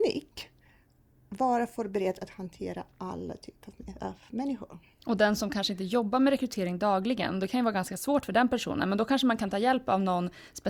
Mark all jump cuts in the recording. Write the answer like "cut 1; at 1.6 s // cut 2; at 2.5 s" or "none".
none